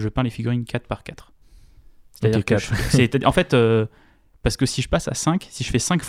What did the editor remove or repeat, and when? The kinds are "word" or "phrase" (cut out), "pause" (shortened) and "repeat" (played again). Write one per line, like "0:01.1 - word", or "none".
none